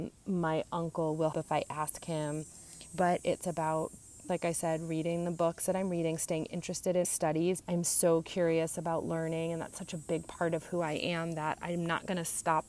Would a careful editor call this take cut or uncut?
cut